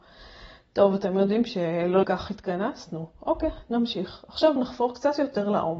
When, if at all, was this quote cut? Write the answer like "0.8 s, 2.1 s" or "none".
2.0 s, 4.6 s